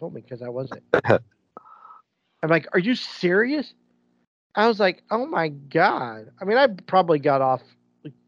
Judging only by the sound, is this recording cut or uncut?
uncut